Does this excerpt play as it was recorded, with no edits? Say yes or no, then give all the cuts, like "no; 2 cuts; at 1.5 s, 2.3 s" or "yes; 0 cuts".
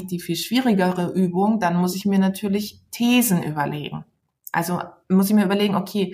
yes; 0 cuts